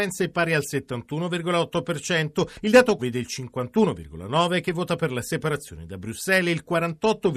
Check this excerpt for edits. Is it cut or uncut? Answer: cut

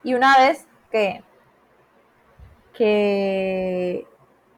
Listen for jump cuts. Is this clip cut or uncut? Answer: cut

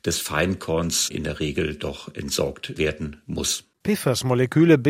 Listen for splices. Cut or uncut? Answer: uncut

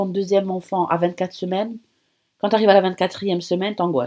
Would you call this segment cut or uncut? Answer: uncut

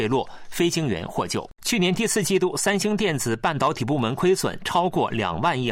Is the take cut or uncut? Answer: cut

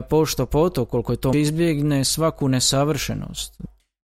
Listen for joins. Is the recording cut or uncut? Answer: cut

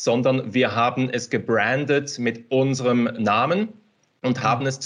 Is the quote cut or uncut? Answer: uncut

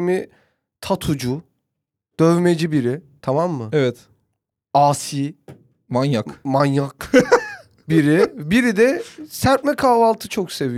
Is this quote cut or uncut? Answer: uncut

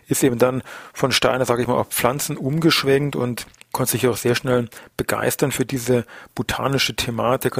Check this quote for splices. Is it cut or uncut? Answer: uncut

